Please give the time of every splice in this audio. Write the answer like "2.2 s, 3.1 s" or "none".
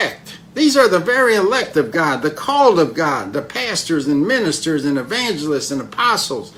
none